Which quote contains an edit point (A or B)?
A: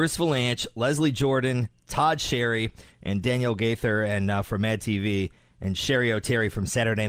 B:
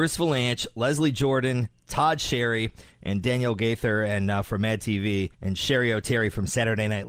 B